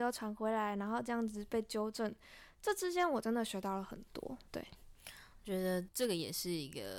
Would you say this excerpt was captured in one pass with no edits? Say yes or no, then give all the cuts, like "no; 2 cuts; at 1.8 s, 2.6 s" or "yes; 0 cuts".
no; 1 cut; at 4.5 s